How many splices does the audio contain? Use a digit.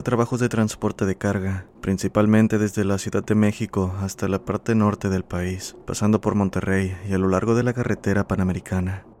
1